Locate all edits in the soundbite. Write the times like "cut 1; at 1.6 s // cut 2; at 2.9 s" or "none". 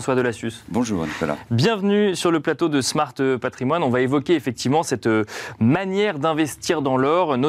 none